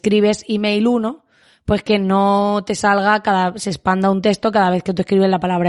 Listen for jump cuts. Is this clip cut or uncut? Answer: uncut